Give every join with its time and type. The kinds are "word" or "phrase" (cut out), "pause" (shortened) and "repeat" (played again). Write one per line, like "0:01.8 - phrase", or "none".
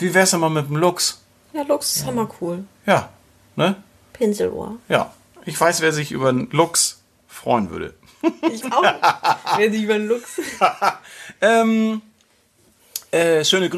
0:08.6 - word